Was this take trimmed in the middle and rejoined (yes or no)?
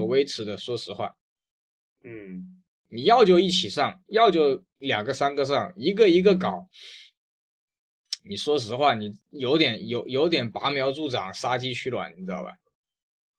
no